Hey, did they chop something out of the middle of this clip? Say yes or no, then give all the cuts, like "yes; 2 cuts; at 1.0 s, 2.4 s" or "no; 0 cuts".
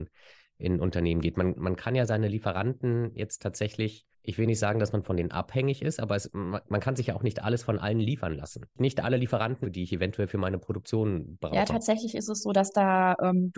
yes; 3 cuts; at 4.1 s, 8.7 s, 9.6 s